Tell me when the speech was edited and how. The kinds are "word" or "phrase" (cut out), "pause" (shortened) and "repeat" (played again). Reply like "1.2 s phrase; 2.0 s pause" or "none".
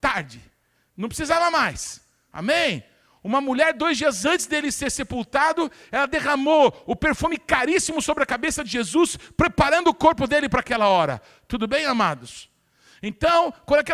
none